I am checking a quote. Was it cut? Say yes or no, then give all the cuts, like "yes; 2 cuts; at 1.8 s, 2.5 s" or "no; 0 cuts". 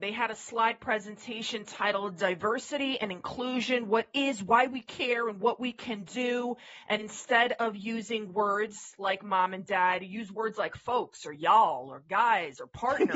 no; 0 cuts